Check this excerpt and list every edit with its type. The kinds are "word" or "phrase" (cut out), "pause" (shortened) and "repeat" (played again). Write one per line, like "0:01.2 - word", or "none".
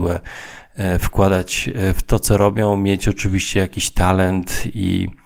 none